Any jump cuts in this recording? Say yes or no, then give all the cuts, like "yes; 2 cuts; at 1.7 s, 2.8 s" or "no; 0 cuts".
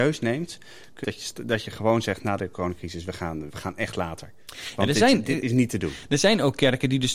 yes; 2 cuts; at 1.0 s, 3.5 s